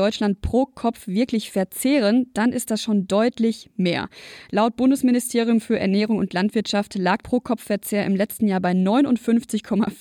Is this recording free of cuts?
no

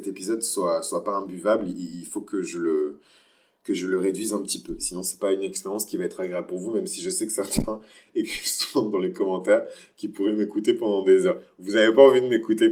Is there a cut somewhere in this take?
no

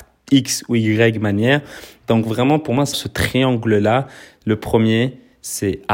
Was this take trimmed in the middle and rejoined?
yes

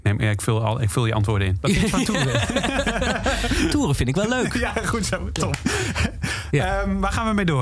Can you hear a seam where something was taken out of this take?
no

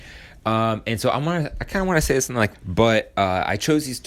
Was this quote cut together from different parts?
yes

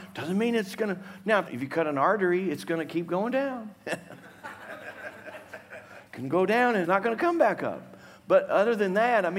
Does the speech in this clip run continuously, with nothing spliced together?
no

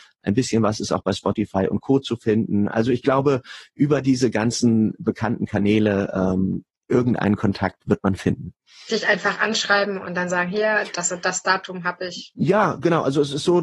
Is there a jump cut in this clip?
no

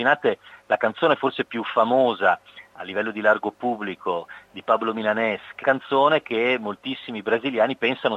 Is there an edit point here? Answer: yes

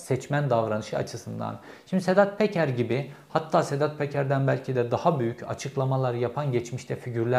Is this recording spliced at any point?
no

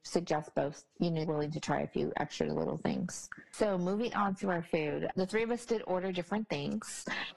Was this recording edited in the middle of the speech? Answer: yes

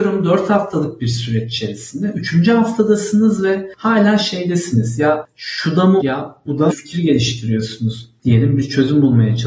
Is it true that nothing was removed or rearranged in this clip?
no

